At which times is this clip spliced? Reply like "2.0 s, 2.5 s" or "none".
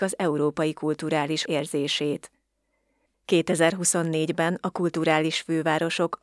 1.5 s